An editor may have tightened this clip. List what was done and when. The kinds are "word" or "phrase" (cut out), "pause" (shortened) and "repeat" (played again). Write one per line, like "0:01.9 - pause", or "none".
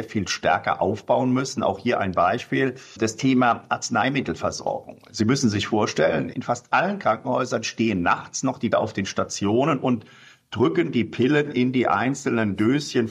0:08.7 - word